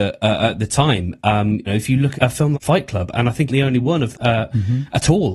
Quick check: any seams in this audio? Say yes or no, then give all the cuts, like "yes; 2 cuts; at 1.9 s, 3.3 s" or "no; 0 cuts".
yes; 5 cuts; at 1.7 s, 2.1 s, 2.5 s, 3.5 s, 4.1 s